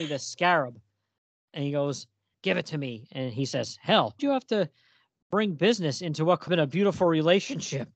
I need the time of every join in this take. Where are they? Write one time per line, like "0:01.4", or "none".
0:02.3
0:04.2
0:06.5